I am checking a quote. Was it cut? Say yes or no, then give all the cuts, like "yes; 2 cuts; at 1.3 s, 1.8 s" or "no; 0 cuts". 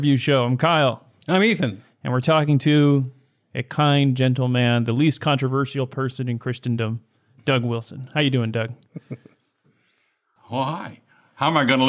no; 0 cuts